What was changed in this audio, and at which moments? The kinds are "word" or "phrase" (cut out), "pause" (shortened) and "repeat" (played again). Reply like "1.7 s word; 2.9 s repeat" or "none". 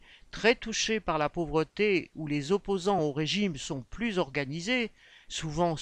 none